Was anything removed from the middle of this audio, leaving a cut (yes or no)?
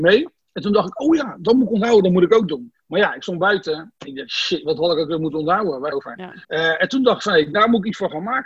yes